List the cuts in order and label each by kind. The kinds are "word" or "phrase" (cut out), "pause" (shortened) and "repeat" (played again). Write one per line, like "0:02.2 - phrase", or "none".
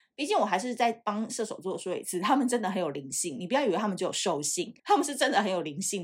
0:04.8 - pause